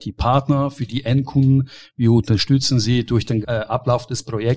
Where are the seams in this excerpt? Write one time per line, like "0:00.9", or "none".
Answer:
0:03.4